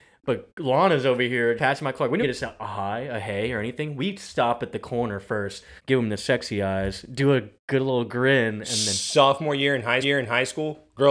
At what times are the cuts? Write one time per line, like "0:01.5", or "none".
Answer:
0:01.6
0:02.2
0:05.8
0:10.0

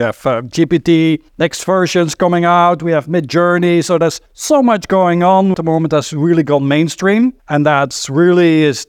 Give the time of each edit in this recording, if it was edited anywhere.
0:01.3
0:04.3
0:05.5
0:07.4

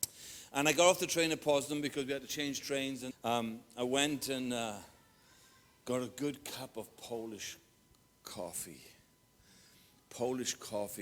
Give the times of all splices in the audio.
0:03.1

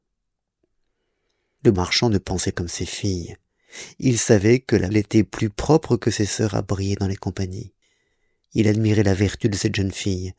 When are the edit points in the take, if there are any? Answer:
0:01.7
0:02.5
0:04.9

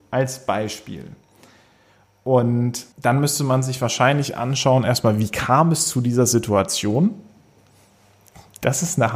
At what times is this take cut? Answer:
0:02.9

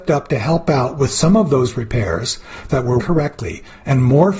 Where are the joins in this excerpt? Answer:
0:02.7
0:03.0

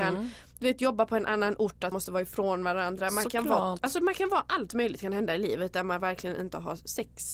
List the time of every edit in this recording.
0:01.9

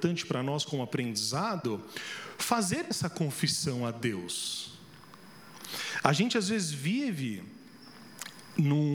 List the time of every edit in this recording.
none

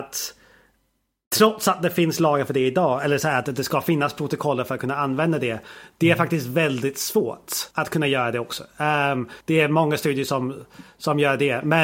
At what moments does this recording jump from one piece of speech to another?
0:07.7
0:09.4

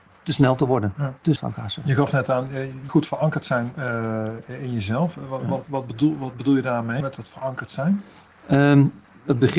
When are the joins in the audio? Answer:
0:01.4
0:02.9
0:05.7
0:07.0

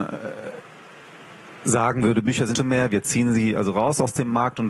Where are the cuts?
0:02.5

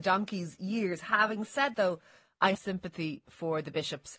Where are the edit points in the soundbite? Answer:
0:01.7
0:02.5

